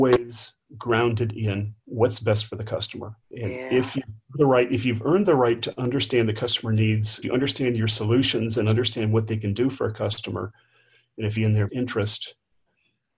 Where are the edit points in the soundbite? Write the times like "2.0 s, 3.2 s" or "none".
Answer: 1.8 s, 3.2 s, 4.3 s, 7.2 s, 11.4 s, 11.7 s